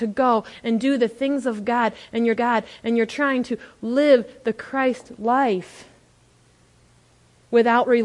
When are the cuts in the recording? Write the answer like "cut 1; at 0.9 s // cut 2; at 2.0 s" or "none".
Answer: cut 1; at 2.4 s